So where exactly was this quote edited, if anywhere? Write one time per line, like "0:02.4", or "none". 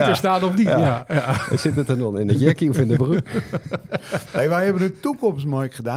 none

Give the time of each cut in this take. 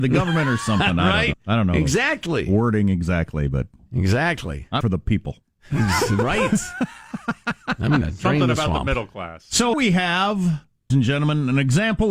0:01.3
0:04.8
0:08.0
0:09.7
0:10.9

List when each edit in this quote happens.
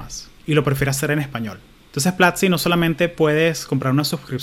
none

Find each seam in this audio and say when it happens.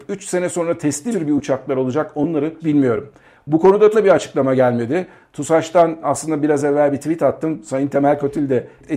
0:01.1
0:02.6
0:03.9
0:06.0

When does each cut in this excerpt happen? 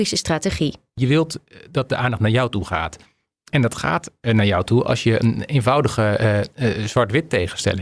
none

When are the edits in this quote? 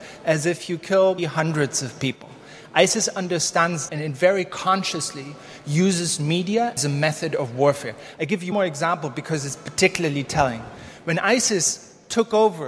0:01.2
0:03.9
0:06.8
0:08.5

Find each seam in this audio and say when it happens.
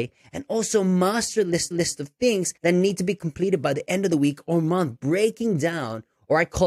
0:01.7
0:02.6

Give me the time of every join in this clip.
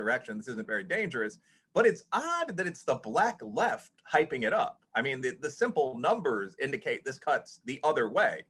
none

